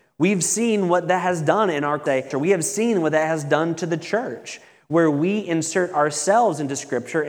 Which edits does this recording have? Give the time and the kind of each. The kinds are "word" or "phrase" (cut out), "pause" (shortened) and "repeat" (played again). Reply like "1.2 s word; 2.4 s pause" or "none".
none